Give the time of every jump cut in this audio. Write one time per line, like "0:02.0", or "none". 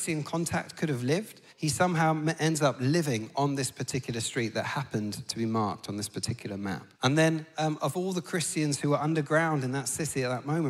0:01.5
0:06.9